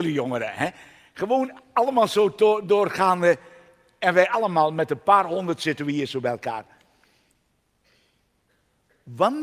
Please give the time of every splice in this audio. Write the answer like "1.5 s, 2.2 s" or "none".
none